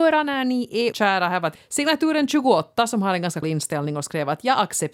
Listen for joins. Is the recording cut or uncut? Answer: cut